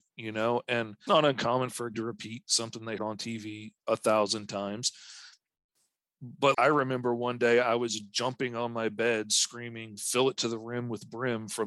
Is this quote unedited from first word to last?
no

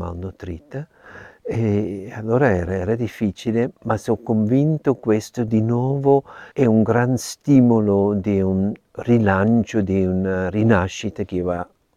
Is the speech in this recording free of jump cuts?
no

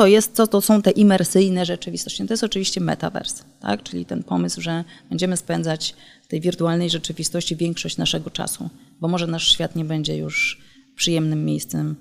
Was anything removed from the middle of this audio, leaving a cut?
no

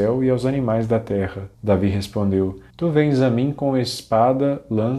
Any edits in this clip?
yes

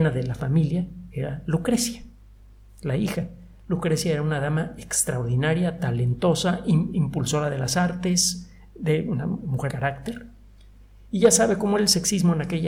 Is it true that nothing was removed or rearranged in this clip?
no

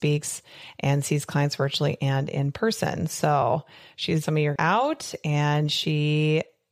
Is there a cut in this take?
yes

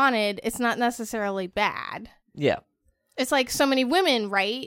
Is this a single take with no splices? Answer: yes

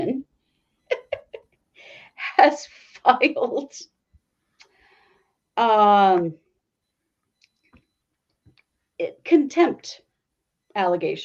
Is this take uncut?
yes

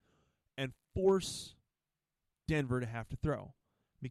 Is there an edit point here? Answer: no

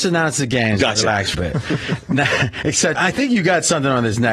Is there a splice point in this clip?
yes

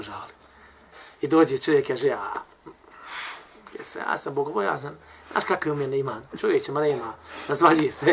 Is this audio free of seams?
yes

